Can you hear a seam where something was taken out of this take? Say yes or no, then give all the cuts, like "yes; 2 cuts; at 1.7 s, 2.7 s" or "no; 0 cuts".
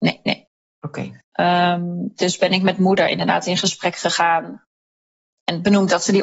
yes; 1 cut; at 1.2 s